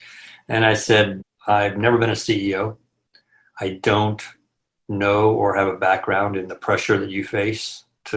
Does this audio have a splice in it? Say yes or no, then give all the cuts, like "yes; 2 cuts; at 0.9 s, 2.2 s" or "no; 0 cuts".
no; 0 cuts